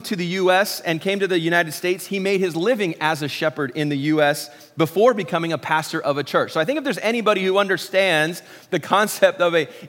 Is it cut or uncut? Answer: uncut